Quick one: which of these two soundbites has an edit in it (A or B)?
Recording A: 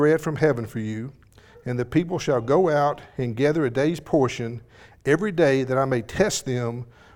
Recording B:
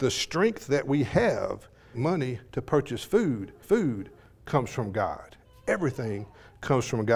B